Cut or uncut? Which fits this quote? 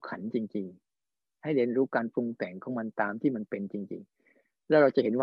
uncut